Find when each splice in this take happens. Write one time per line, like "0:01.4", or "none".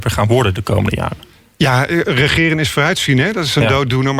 none